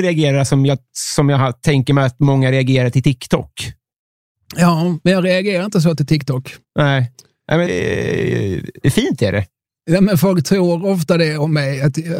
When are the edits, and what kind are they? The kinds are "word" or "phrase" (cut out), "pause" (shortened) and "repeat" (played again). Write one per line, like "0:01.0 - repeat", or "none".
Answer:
0:06.6 - pause
0:07.7 - word